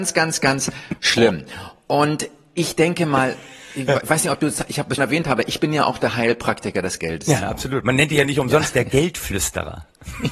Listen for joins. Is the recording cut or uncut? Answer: cut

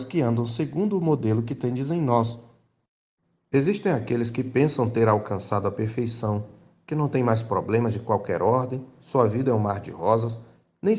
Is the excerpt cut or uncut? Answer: uncut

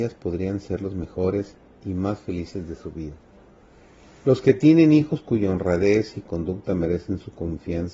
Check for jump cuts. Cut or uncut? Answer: uncut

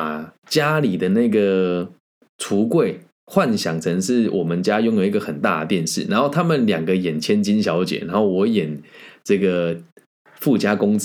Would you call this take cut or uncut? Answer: uncut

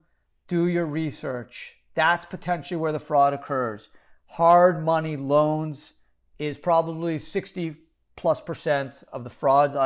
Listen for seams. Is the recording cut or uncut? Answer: uncut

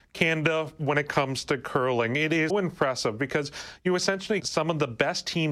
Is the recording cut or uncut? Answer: cut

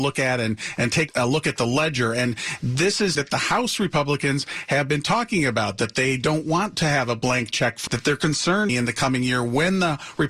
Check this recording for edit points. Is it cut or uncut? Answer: cut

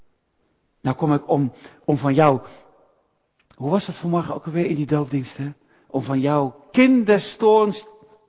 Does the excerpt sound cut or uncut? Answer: uncut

